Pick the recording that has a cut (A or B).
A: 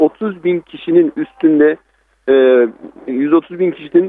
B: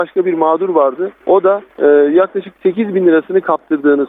B